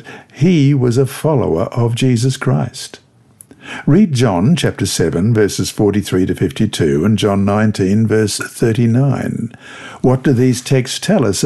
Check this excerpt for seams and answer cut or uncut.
uncut